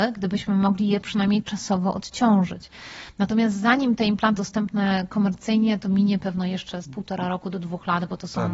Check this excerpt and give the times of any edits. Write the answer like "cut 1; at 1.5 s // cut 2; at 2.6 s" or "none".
cut 1; at 4.4 s // cut 2; at 6.8 s

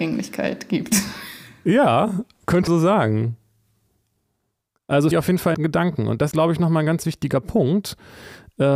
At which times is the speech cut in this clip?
cut 1; at 2.7 s // cut 2; at 5.1 s // cut 3; at 5.5 s // cut 4; at 6.3 s

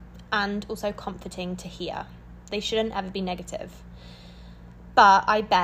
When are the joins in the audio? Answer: none

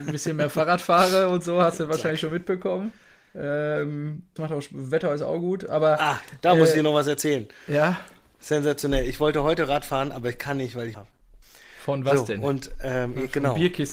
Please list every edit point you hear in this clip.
cut 1; at 4.4 s // cut 2; at 10.9 s

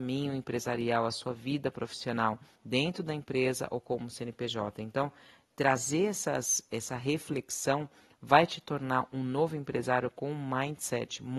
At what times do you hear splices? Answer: none

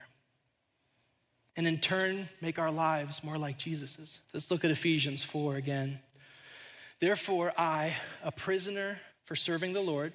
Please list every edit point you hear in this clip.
cut 1; at 4.2 s // cut 2; at 9.1 s

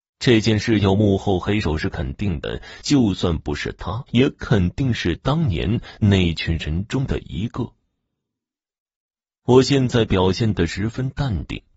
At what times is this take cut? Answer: cut 1; at 4.1 s

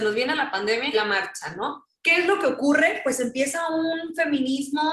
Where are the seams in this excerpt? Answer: cut 1; at 0.9 s // cut 2; at 1.9 s

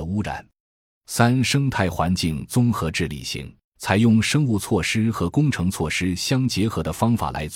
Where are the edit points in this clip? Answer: cut 1; at 3.6 s

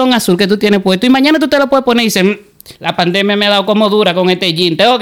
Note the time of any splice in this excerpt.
cut 1; at 2.7 s

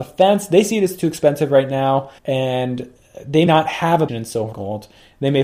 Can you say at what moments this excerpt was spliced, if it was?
cut 1; at 2.2 s // cut 2; at 3.5 s // cut 3; at 4.1 s // cut 4; at 4.5 s

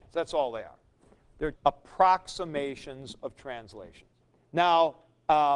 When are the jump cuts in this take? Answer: cut 1; at 1.5 s // cut 2; at 4.2 s

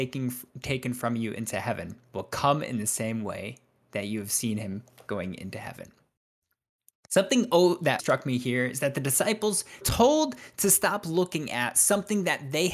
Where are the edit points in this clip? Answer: cut 1; at 2.1 s // cut 2; at 8.0 s // cut 3; at 9.8 s

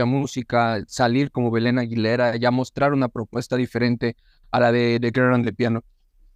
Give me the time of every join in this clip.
none

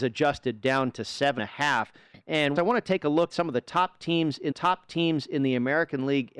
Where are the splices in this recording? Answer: cut 1; at 1.4 s // cut 2; at 2.6 s // cut 3; at 3.3 s // cut 4; at 4.5 s

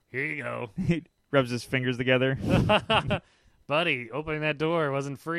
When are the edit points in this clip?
cut 1; at 1.2 s

